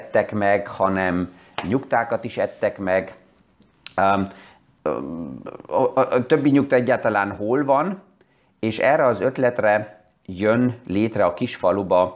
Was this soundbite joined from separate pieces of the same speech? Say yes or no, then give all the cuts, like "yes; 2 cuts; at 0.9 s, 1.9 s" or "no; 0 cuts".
no; 0 cuts